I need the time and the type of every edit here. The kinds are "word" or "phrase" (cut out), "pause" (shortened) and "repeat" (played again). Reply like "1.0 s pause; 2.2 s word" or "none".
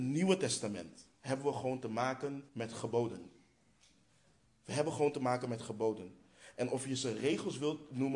1.1 s pause; 2.5 s pause